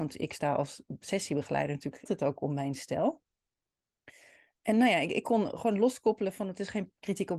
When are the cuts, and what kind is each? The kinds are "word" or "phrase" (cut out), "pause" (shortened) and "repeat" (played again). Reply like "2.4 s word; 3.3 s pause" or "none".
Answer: 2.1 s word